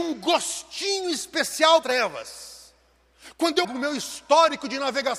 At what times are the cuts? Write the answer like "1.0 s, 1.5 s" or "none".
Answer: 1.8 s, 3.6 s